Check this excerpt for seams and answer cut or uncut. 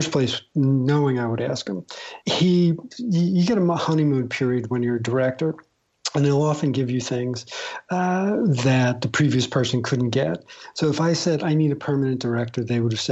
cut